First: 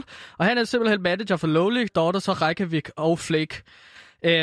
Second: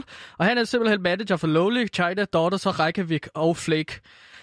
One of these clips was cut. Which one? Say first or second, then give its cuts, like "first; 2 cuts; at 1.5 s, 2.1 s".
first; 1 cut; at 1.9 s